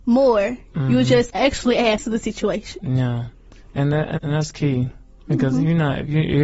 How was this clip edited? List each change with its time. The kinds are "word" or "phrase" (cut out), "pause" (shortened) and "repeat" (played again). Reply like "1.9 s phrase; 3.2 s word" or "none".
1.3 s word; 2.0 s word; 4.2 s word

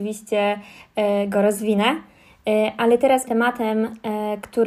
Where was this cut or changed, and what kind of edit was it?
3.3 s word

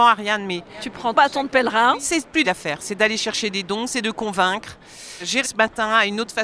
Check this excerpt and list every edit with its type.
1.1 s word; 2.4 s word; 5.4 s word

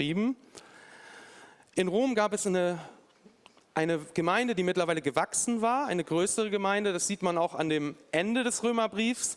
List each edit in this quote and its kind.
none

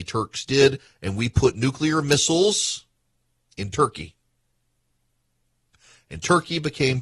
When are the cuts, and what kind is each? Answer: 3.1 s pause

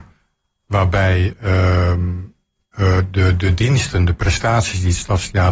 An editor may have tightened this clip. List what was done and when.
none

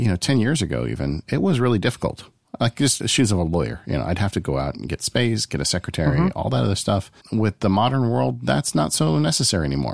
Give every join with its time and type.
3.0 s word; 7.2 s pause

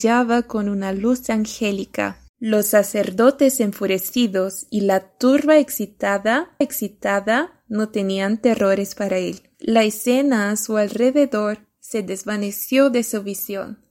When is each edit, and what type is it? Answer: 2.3 s pause; 6.6 s repeat; 9.5 s pause

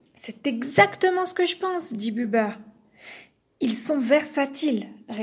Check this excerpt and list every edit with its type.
none

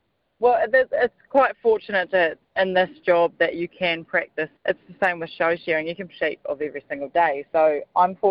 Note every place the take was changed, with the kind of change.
2.4 s pause; 4.6 s pause; 6.1 s phrase

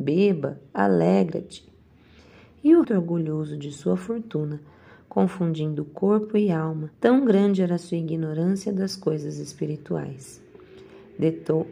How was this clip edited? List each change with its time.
2.8 s phrase; 6.9 s pause

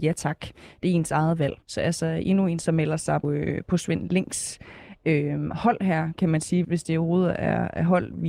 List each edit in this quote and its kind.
1.6 s pause; 3.2 s word; 6.6 s word

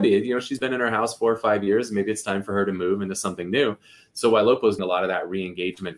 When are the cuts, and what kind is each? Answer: 4.8 s word

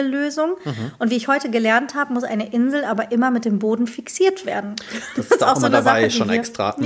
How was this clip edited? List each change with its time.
none

